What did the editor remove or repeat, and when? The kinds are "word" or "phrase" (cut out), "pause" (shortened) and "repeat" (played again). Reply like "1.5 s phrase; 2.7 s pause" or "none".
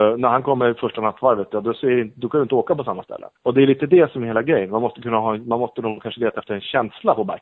3.3 s pause